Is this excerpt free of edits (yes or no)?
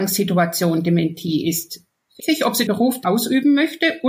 no